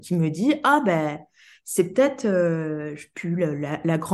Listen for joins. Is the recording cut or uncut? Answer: uncut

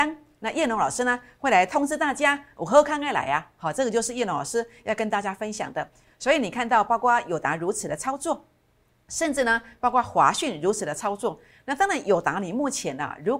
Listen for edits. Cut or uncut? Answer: uncut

